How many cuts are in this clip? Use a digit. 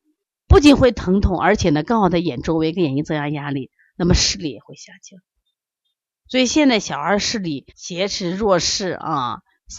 1